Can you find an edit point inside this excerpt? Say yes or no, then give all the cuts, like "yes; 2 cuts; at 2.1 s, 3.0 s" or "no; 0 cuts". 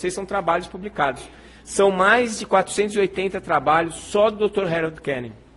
no; 0 cuts